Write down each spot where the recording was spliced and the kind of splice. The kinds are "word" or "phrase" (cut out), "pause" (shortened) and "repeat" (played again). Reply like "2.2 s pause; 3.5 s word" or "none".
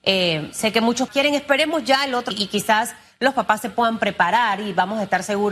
1.1 s word; 2.3 s phrase